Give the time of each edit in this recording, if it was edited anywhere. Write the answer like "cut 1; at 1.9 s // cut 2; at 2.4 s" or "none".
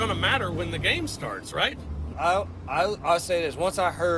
cut 1; at 2.1 s